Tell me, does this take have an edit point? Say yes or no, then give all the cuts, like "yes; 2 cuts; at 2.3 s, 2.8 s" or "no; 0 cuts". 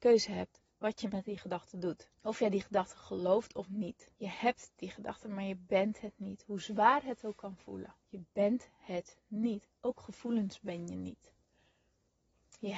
yes; 3 cuts; at 2.1 s, 4.2 s, 8.0 s